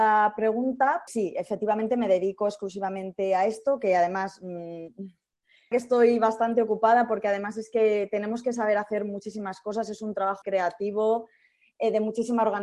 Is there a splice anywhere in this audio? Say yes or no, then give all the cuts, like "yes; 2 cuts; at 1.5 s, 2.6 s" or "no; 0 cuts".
yes; 3 cuts; at 1.1 s, 5.7 s, 10.4 s